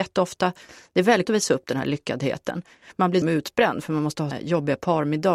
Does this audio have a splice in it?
yes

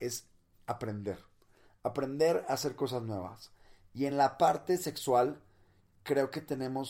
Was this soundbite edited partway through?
no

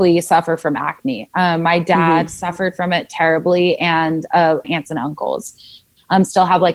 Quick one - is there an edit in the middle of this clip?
yes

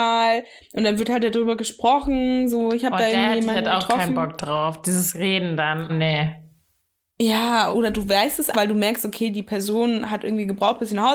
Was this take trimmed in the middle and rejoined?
yes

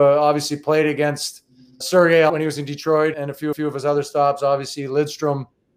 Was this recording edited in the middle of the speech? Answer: yes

